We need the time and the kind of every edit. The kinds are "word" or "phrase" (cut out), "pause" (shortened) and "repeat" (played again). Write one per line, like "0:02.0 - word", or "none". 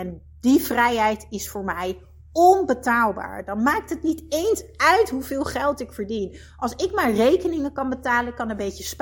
none